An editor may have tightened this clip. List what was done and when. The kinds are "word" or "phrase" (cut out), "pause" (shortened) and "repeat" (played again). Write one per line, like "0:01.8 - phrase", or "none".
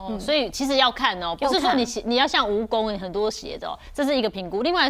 none